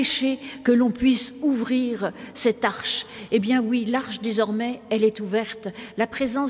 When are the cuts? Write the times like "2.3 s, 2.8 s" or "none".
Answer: none